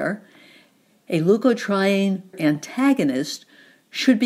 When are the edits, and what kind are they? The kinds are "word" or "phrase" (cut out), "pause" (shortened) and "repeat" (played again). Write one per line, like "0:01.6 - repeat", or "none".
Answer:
0:02.3 - word